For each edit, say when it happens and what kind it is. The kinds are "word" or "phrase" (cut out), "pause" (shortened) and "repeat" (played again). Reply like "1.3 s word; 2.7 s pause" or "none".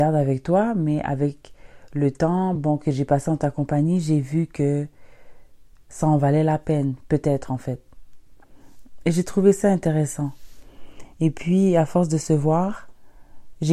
none